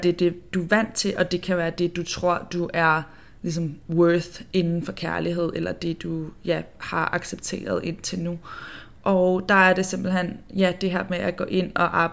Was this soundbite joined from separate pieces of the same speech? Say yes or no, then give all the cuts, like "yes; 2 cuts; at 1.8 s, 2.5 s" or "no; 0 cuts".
no; 0 cuts